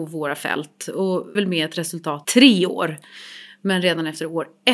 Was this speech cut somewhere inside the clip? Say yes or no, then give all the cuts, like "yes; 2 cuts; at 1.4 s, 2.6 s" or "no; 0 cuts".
yes; 2 cuts; at 1.3 s, 2.2 s